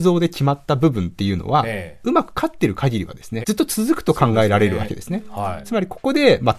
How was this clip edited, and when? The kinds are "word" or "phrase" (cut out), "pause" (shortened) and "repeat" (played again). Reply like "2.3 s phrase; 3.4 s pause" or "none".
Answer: 3.4 s word